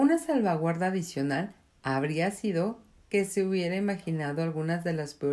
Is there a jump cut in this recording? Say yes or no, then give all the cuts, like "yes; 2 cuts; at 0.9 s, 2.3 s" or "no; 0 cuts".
no; 0 cuts